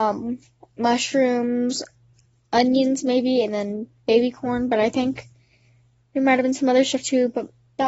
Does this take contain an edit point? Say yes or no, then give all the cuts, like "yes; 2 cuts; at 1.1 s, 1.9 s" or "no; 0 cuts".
no; 0 cuts